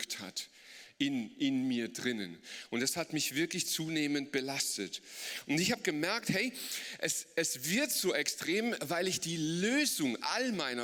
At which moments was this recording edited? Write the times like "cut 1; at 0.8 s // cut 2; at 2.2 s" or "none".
none